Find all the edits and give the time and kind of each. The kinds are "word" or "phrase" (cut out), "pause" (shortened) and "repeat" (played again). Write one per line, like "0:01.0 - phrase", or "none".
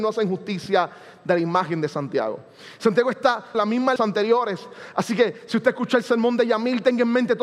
0:03.5 - word
0:04.0 - phrase

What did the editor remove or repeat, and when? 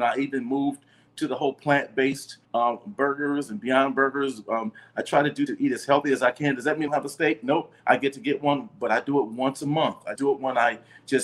0:02.4 - pause
0:05.5 - word
0:06.9 - word
0:07.8 - pause
0:10.2 - word

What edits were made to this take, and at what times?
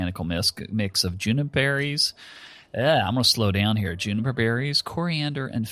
none

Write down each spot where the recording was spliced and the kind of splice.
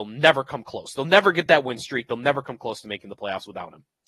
none

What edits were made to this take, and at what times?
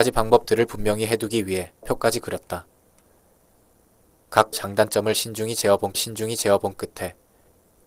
0:01.8 - word
0:04.5 - word
0:05.9 - repeat

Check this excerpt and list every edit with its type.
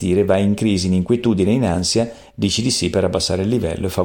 none

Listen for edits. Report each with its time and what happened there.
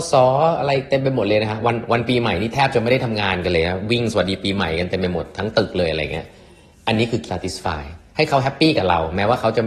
0:07.3 - word

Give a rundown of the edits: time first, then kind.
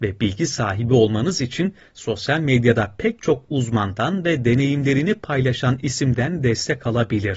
none

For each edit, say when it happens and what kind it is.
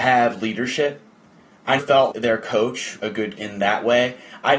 0:01.8 - word
0:02.1 - word
0:03.0 - word
0:03.4 - word

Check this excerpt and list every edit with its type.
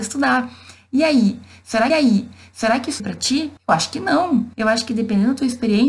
0:01.9 - repeat
0:03.0 - phrase
0:03.6 - pause
0:04.5 - pause

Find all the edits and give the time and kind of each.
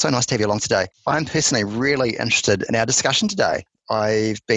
0:02.7 - word

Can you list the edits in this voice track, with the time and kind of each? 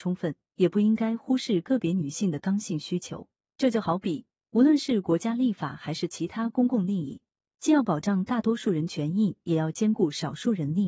none

